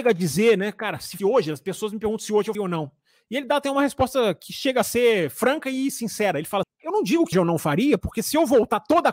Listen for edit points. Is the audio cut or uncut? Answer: cut